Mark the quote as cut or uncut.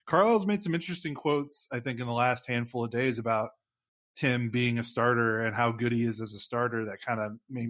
uncut